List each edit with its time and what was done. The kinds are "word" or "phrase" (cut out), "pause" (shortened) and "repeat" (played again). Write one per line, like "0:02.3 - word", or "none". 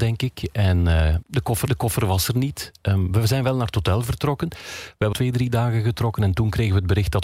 0:01.2 - word
0:01.7 - repeat
0:05.1 - phrase